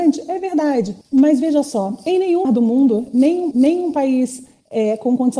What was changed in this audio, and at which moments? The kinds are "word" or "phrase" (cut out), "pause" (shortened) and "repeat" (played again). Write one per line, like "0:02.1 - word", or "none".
0:01.0 - pause
0:02.4 - word
0:03.5 - repeat